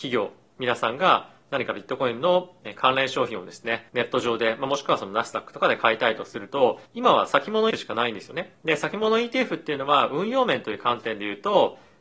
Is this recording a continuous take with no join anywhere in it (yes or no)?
no